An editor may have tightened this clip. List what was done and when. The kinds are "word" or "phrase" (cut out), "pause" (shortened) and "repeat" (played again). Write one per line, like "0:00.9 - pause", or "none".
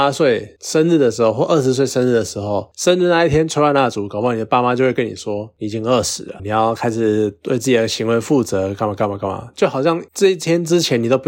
0:06.4 - word
0:10.1 - pause